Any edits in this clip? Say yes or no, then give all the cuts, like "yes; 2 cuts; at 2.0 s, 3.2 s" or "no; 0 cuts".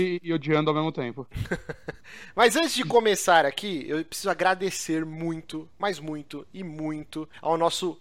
no; 0 cuts